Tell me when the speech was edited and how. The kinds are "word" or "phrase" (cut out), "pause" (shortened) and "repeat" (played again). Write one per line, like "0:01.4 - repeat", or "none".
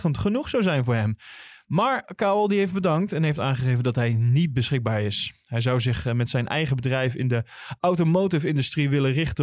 none